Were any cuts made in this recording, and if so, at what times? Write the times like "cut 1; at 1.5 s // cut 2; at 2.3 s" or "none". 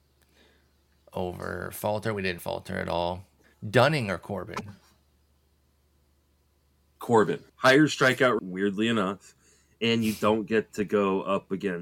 cut 1; at 2.4 s // cut 2; at 3.4 s // cut 3; at 7.5 s // cut 4; at 8.4 s